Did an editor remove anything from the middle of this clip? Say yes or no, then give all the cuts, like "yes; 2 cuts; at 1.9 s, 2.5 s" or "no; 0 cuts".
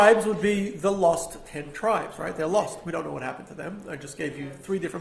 no; 0 cuts